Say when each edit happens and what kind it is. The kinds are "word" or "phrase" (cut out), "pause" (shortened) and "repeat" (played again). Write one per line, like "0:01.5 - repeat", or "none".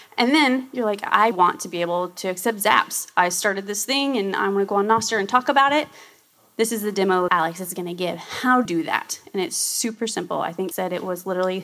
0:01.3 - word
0:07.3 - word
0:08.6 - word
0:10.7 - word